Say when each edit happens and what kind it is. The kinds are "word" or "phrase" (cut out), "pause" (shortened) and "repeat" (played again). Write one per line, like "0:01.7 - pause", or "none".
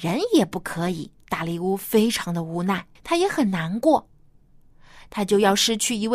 0:01.2 - pause
0:03.0 - pause